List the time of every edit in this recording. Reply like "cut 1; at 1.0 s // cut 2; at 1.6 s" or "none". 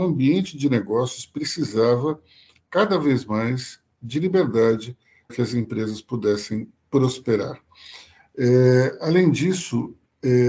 cut 1; at 5.3 s

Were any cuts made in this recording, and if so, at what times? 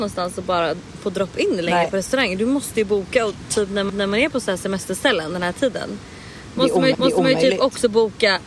cut 1; at 3.9 s // cut 2; at 6.9 s

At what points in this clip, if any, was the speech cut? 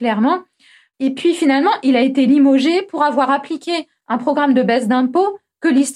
none

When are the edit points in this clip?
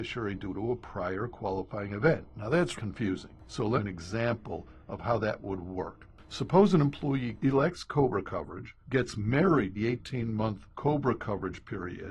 cut 1; at 2.8 s // cut 2; at 3.8 s // cut 3; at 7.4 s // cut 4; at 8.8 s // cut 5; at 9.7 s // cut 6; at 10.7 s

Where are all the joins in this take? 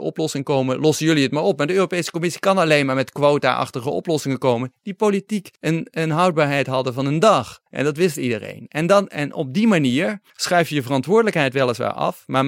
cut 1; at 5.6 s // cut 2; at 7.7 s // cut 3; at 10.3 s

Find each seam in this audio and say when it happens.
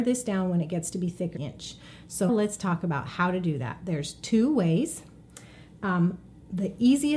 cut 1; at 1.4 s // cut 2; at 2.3 s

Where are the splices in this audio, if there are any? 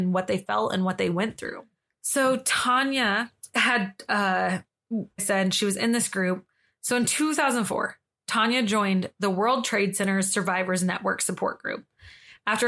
cut 1; at 5.2 s

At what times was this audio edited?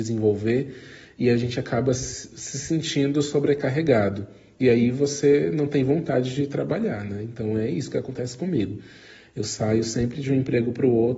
none

